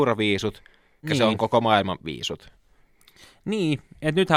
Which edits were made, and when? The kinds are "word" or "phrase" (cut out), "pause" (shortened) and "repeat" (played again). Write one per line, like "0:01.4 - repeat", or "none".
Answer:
0:01.0 - word